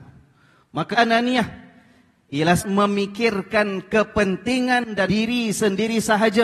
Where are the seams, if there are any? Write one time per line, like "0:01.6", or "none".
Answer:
0:00.9
0:02.6
0:05.1